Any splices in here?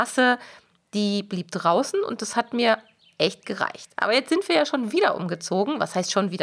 no; 0 cuts

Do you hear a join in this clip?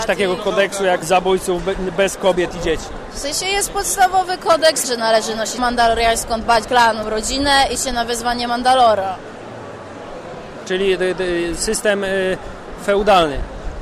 yes; 6 cuts; at 1.0 s, 4.8 s, 5.6 s, 6.6 s, 7.0 s, 7.8 s

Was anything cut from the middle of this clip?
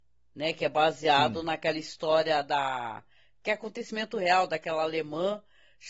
no; 0 cuts

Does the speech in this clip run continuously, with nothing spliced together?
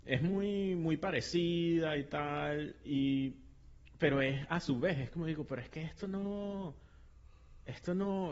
yes; 0 cuts

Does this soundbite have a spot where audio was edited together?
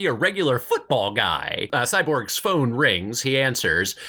no; 0 cuts

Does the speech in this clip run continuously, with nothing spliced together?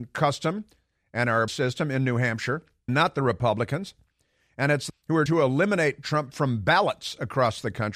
no; 5 cuts; at 1.5 s, 2.9 s, 4.9 s, 5.3 s, 6.0 s

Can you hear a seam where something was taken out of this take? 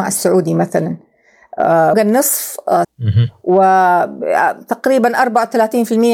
yes; 2 cuts; at 1.9 s, 2.8 s

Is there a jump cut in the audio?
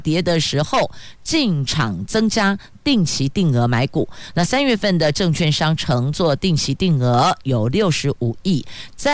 no; 0 cuts

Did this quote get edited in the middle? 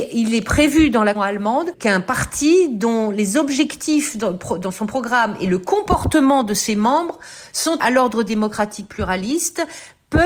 yes; 2 cuts; at 1.1 s, 7.8 s

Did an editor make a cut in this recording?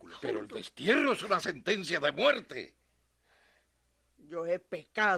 no; 0 cuts

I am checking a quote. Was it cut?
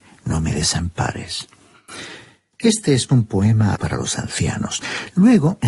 yes; 2 cuts; at 3.1 s, 3.8 s

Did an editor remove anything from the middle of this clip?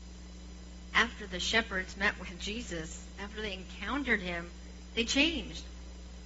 no; 0 cuts

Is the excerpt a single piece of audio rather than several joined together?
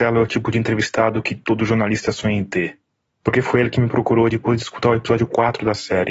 yes; 0 cuts

